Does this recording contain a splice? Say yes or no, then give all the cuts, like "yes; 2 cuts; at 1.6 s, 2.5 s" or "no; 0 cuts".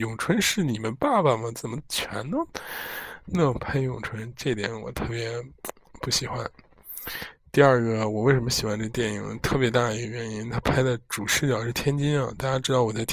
no; 0 cuts